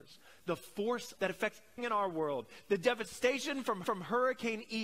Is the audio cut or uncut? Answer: cut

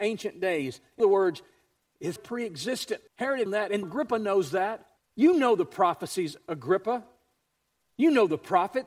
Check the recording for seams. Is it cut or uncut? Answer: cut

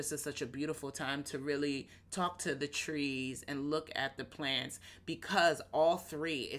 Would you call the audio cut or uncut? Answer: uncut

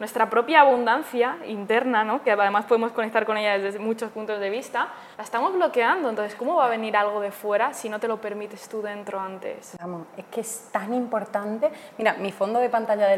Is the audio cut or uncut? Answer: cut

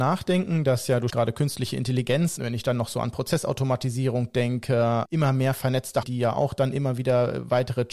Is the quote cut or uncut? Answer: cut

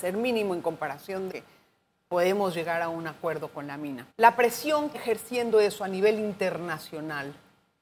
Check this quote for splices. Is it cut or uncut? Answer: cut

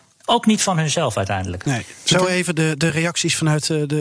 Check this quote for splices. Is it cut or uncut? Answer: uncut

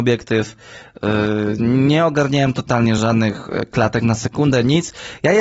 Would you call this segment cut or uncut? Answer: uncut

